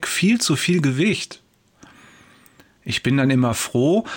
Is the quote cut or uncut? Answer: uncut